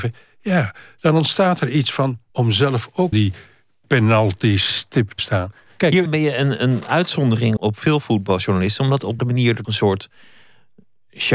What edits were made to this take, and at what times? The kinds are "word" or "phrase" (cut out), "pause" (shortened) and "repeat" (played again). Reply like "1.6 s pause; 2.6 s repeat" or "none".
2.3 s word; 3.1 s word; 5.2 s word; 6.1 s word; 7.6 s word; 9.2 s phrase; 9.6 s word